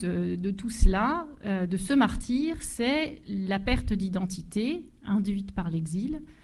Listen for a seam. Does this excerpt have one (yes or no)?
no